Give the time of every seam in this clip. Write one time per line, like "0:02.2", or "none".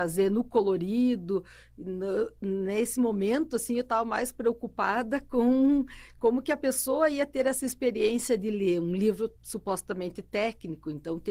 0:09.4